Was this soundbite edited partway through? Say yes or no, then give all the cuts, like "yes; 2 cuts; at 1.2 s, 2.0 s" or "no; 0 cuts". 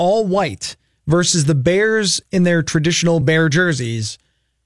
no; 0 cuts